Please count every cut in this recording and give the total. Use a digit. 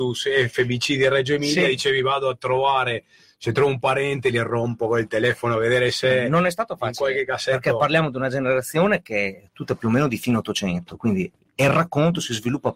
0